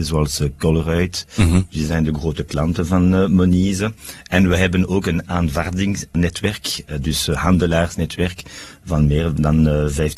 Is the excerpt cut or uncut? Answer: uncut